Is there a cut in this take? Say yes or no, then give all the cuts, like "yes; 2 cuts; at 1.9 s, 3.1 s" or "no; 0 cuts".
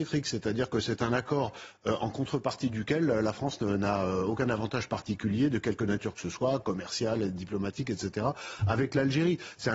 no; 0 cuts